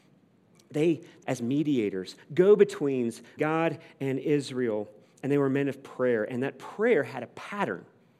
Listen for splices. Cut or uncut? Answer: cut